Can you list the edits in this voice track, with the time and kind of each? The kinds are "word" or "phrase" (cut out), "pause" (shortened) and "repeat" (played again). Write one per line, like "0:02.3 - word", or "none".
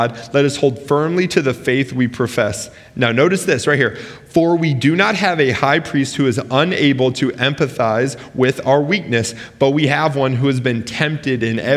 none